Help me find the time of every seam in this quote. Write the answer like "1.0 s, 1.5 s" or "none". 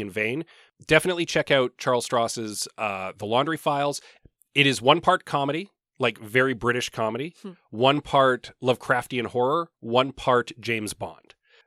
none